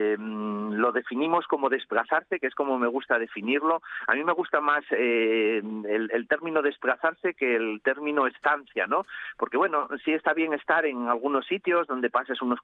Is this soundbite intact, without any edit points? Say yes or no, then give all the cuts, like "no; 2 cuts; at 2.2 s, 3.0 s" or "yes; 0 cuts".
yes; 0 cuts